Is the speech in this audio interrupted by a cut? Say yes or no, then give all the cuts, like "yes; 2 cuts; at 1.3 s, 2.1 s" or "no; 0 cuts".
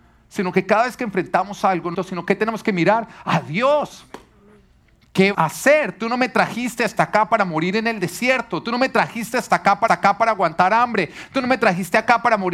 yes; 3 cuts; at 1.9 s, 5.3 s, 9.9 s